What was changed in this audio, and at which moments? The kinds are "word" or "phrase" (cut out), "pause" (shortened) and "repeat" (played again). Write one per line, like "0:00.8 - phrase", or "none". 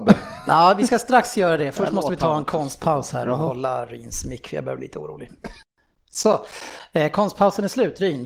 none